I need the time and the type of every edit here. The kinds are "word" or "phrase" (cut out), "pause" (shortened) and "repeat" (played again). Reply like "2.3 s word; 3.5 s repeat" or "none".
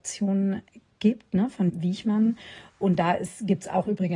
1.7 s word